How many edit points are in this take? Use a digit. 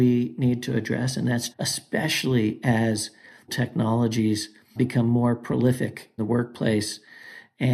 4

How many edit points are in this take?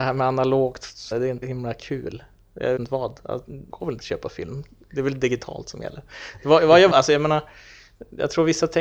5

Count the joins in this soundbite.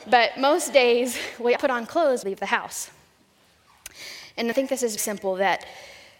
4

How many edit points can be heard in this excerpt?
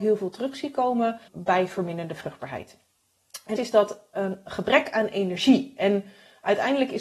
2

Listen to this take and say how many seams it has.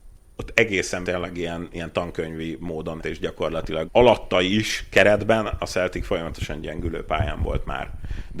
3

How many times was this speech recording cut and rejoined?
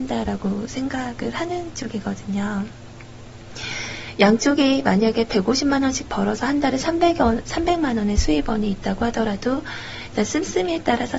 0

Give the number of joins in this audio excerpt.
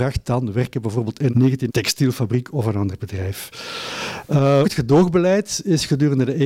3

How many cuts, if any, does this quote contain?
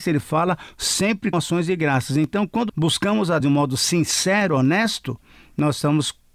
3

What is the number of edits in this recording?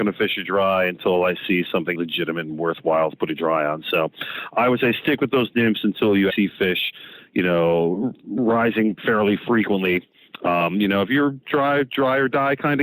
2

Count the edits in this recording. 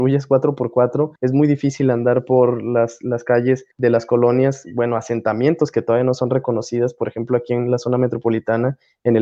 2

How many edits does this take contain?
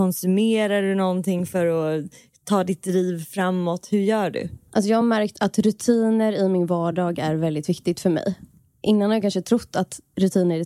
0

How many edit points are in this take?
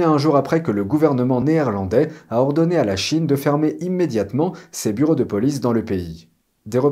0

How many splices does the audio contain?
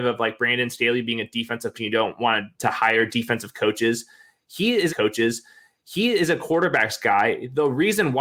3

